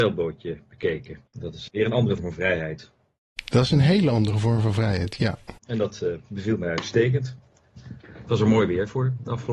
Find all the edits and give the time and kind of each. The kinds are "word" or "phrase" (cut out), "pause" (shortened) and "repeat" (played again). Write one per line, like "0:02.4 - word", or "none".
0:01.3 - pause
0:01.7 - word
0:02.2 - word
0:05.6 - pause